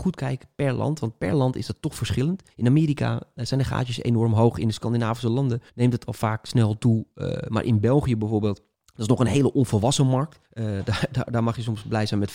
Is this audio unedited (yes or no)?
no